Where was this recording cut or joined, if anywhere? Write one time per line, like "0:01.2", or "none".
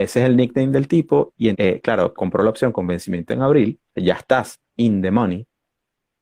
0:01.5
0:02.2
0:03.9